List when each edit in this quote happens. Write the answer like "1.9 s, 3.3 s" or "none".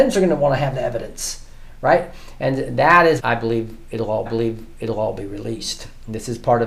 3.2 s, 4.3 s